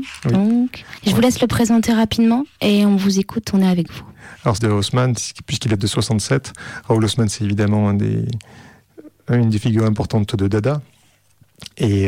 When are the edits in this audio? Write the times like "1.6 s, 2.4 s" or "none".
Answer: 1.0 s, 4.6 s